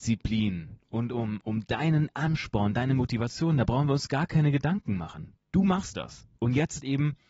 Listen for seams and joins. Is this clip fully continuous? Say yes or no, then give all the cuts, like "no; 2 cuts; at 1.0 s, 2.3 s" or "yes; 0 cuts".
no; 1 cut; at 6.3 s